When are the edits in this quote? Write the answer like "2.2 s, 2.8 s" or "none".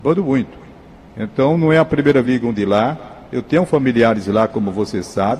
2.2 s